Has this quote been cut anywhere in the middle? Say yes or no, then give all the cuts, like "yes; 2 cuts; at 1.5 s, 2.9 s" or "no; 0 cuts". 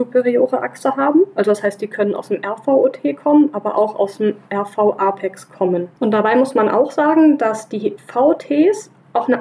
yes; 1 cut; at 6.0 s